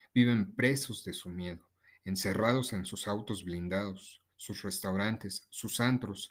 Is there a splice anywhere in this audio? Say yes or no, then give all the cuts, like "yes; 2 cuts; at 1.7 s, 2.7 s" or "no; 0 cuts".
no; 0 cuts